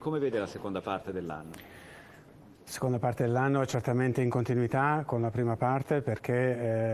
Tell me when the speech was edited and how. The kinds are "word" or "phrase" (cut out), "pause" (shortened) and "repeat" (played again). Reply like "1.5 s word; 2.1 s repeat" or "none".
none